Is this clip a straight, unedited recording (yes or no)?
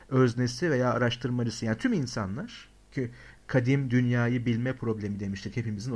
yes